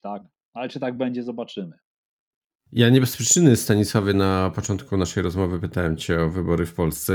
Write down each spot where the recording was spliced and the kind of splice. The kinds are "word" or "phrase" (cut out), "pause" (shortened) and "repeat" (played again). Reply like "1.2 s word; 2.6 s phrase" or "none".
none